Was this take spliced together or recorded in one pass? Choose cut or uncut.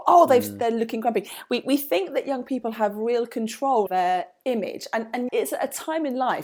cut